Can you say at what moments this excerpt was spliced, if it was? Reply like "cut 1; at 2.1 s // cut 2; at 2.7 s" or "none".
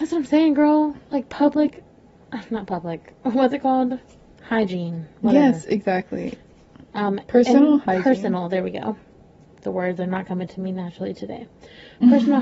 none